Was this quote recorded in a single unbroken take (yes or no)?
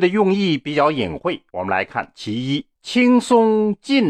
no